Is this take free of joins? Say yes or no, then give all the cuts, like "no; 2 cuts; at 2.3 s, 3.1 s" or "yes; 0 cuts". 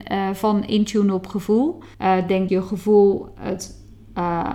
no; 2 cuts; at 1.9 s, 2.5 s